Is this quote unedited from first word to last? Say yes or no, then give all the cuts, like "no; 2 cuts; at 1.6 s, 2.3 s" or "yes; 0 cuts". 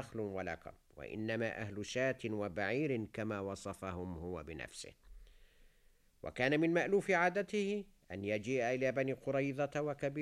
yes; 0 cuts